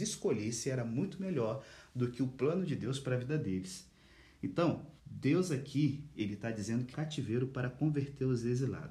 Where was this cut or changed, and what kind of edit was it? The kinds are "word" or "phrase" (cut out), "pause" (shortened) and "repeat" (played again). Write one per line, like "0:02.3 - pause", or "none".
0:05.0 - pause
0:06.9 - phrase